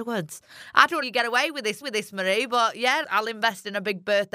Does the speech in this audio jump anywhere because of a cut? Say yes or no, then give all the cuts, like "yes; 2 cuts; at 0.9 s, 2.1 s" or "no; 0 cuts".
yes; 3 cuts; at 1.0 s, 1.8 s, 3.0 s